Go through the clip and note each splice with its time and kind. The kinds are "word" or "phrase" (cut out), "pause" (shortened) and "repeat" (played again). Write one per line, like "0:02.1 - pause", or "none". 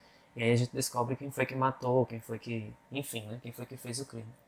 0:02.8 - pause